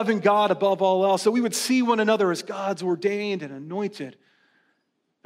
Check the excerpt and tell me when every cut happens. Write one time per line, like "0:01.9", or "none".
none

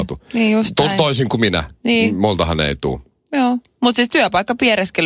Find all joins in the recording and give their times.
none

